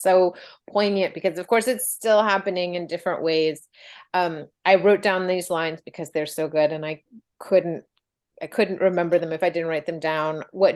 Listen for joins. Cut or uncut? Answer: uncut